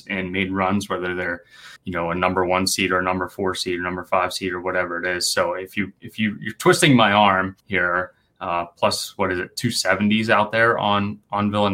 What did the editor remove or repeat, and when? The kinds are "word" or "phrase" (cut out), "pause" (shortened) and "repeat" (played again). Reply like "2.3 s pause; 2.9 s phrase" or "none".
1.8 s pause; 7.6 s pause